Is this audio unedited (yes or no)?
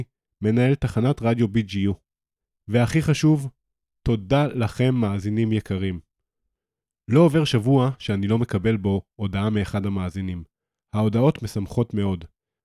yes